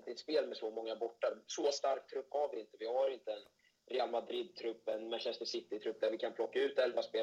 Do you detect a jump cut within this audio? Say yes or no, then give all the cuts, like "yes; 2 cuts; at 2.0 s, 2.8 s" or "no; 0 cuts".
no; 0 cuts